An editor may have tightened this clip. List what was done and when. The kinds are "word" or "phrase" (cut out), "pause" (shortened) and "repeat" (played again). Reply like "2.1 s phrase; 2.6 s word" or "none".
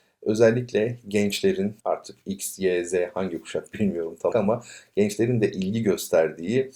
1.8 s pause; 4.3 s word